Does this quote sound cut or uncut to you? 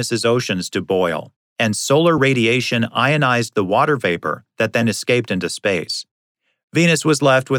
uncut